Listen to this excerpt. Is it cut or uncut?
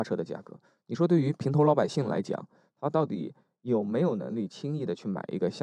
uncut